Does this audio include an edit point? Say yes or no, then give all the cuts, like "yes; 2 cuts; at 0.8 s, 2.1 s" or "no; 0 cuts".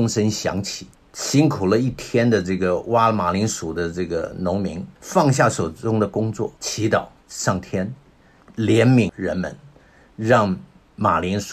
yes; 4 cuts; at 0.9 s, 5.0 s, 6.6 s, 7.2 s